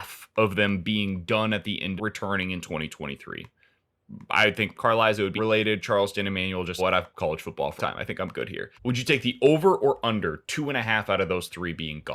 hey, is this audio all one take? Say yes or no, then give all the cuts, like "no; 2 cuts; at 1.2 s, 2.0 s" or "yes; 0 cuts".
no; 7 cuts; at 2.0 s, 4.7 s, 5.4 s, 6.8 s, 7.1 s, 7.8 s, 8.7 s